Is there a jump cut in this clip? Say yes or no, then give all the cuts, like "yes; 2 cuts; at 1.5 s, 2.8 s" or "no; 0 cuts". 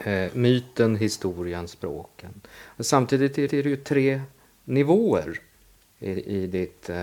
yes; 1 cut; at 3.5 s